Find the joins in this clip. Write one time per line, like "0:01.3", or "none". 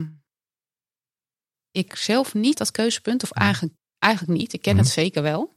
0:01.5
0:01.9
0:02.5